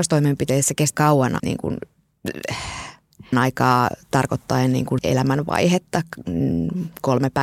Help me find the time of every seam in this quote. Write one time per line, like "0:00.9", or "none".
0:00.9
0:01.4
0:03.3
0:05.0